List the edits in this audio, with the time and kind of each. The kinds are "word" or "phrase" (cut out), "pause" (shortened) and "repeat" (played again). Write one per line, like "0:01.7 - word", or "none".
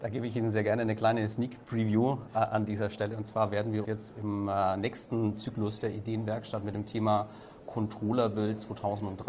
0:03.8 - word